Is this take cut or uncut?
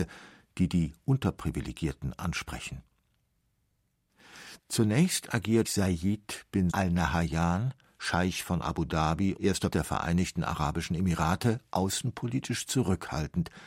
cut